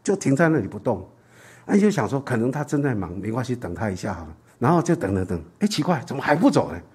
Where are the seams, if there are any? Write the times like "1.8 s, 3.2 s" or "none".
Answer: 4.5 s